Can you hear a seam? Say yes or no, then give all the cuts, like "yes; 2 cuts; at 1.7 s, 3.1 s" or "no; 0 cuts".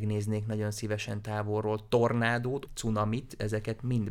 yes; 1 cut; at 2.7 s